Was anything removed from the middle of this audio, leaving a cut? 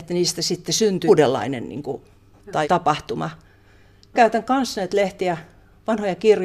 yes; 4 cuts; at 1.1 s, 2.3 s, 2.6 s, 4.1 s

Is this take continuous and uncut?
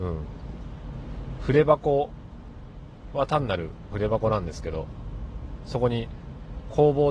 no; 1 cut; at 3.9 s

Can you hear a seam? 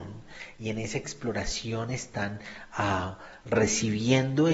no; 0 cuts

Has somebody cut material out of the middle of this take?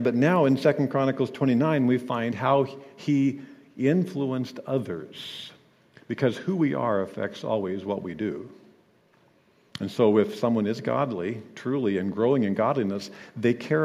no; 0 cuts

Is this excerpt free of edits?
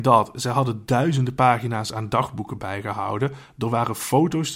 yes; 0 cuts

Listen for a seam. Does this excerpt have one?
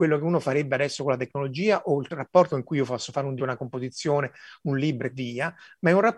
yes; 3 cuts; at 2.5 s, 3.4 s, 5.1 s

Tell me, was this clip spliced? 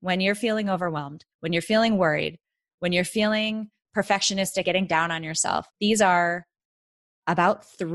yes; 3 cuts; at 1.3 s, 4.6 s, 5.7 s

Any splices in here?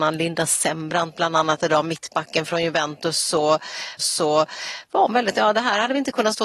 yes; 1 cut; at 4.0 s

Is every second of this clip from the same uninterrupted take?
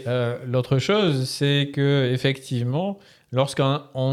yes; 0 cuts

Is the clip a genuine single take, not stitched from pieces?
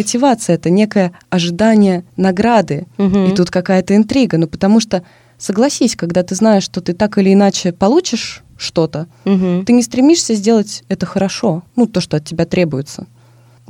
no; 3 cuts; at 2.1 s, 8.5 s, 11.7 s

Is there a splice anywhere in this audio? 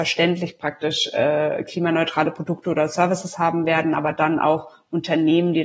no; 0 cuts

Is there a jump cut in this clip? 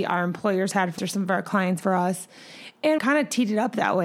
yes; 3 cuts; at 1.0 s, 1.8 s, 3.0 s

